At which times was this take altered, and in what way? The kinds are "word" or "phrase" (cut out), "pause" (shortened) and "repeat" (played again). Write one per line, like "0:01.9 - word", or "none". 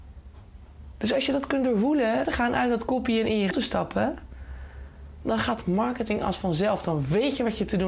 0:02.2 - phrase
0:03.5 - word